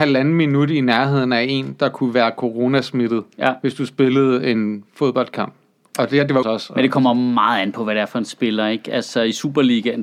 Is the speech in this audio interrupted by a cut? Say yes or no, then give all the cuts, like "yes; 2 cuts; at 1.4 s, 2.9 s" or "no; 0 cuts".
yes; 1 cut; at 6.4 s